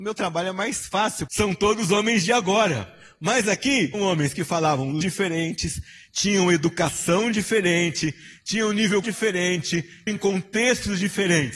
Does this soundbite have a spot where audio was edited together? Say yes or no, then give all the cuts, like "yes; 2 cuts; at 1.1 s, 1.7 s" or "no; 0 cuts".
yes; 5 cuts; at 1.3 s, 3.9 s, 5.0 s, 9.0 s, 10.1 s